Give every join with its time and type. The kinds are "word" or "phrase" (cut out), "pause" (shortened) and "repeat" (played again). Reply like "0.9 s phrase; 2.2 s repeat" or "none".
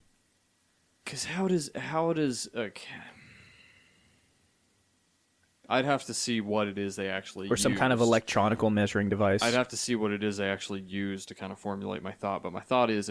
none